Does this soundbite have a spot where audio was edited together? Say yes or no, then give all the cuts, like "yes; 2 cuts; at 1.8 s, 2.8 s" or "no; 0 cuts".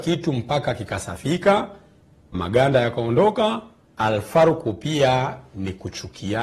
yes; 2 cuts; at 2.3 s, 3.8 s